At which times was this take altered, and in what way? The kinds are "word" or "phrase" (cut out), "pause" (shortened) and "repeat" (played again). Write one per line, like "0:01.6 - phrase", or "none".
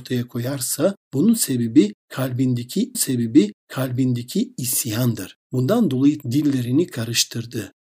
0:02.9 - repeat
0:06.2 - word

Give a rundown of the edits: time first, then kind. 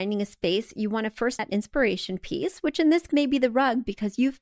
0:01.4 - word
0:03.1 - word

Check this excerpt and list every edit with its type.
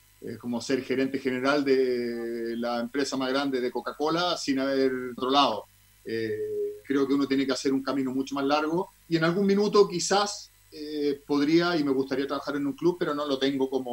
0:05.2 - phrase
0:06.8 - word
0:09.0 - pause

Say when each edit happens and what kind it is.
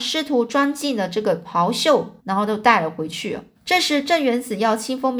0:02.2 - pause
0:03.5 - pause

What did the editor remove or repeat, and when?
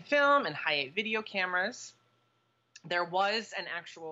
none

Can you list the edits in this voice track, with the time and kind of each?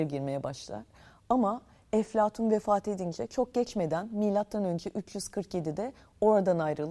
none

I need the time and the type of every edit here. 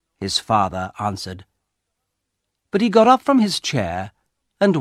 none

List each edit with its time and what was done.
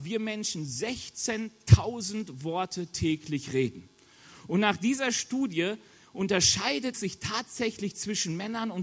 0:06.9 - word

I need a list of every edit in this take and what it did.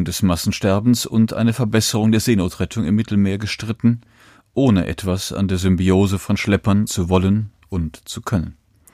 0:06.9 - phrase

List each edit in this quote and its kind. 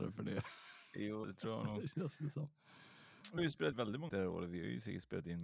0:01.2 - word
0:03.4 - word
0:03.7 - word
0:04.1 - word

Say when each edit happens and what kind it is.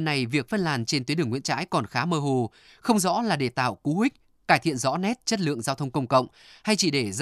none

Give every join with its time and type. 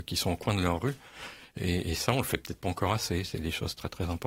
none

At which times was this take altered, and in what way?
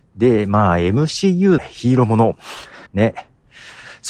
0:01.6 - phrase
0:02.9 - pause

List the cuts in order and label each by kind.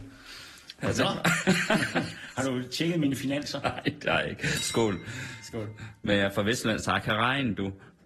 none

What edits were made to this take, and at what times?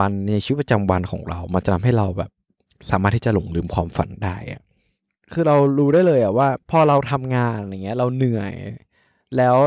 0:06.6 - pause

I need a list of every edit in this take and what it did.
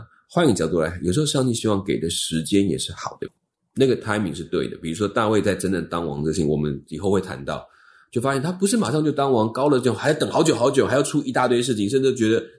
none

